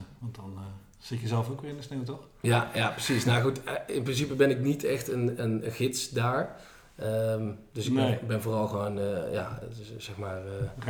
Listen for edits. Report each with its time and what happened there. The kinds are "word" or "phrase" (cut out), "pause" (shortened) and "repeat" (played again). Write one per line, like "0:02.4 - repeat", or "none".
none